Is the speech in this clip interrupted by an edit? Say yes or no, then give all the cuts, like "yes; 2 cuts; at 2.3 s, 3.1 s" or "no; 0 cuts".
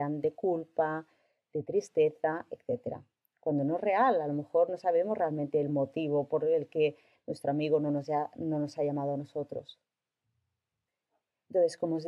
no; 0 cuts